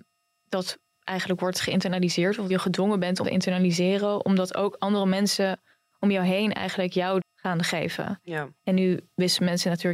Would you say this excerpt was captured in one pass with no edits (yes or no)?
no